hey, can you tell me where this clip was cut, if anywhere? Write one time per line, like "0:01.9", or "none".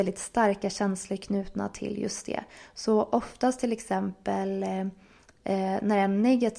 none

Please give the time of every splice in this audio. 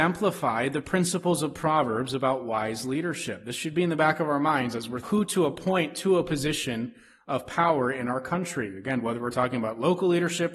0:05.0

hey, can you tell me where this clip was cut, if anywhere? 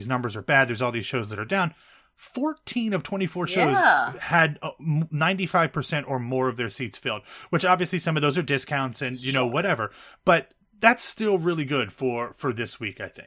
none

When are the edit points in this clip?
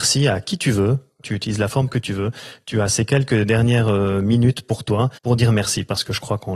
0:05.2

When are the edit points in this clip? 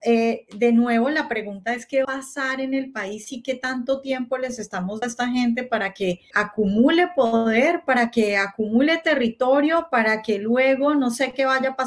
0:02.0
0:05.0
0:06.3

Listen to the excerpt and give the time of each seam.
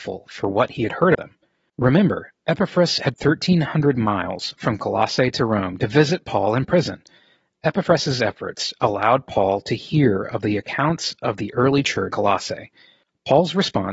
0:01.1
0:03.1
0:12.1

